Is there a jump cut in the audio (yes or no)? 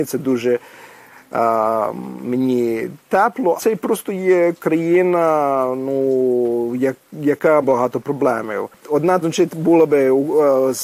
yes